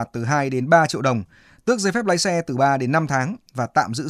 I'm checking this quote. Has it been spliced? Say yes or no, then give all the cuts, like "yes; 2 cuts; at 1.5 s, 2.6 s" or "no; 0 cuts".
no; 0 cuts